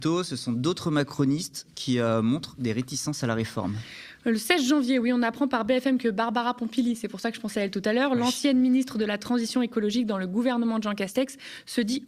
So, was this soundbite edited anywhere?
no; 0 cuts

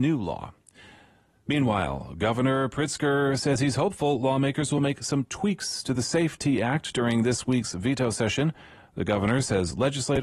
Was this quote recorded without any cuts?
yes; 0 cuts

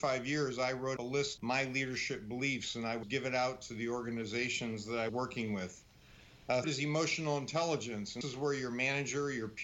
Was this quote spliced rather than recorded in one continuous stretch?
yes; 6 cuts; at 1.0 s, 1.4 s, 3.0 s, 5.1 s, 6.6 s, 8.2 s

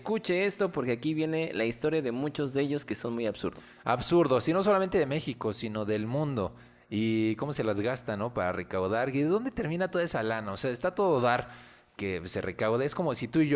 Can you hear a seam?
no; 0 cuts

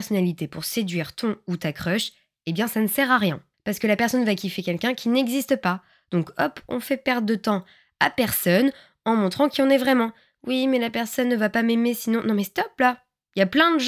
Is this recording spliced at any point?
no; 0 cuts

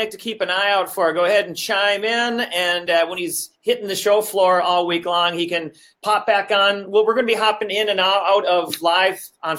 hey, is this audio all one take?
yes; 0 cuts

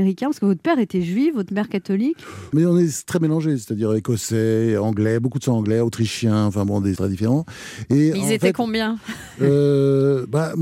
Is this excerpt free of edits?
no; 2 cuts; at 2.5 s, 7.0 s

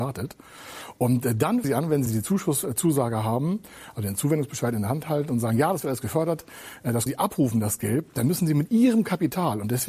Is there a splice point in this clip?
yes; 3 cuts; at 1.6 s, 2.1 s, 7.1 s

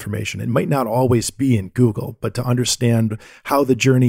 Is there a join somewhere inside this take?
no; 0 cuts

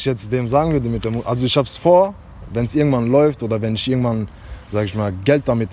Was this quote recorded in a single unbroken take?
yes; 0 cuts

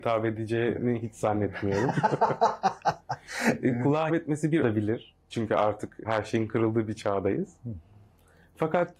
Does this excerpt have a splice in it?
yes; 4 cuts; at 4.1 s, 4.6 s, 5.2 s, 6.0 s

